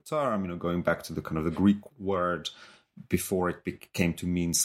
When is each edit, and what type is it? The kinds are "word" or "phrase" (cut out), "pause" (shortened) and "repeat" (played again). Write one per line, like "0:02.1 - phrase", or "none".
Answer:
none